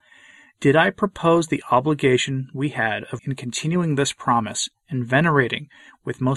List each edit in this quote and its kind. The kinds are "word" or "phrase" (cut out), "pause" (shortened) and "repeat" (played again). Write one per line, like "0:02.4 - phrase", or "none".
0:03.2 - word